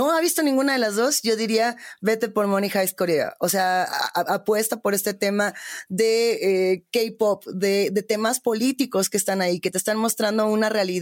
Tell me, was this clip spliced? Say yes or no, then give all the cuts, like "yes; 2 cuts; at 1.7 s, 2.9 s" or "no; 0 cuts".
no; 0 cuts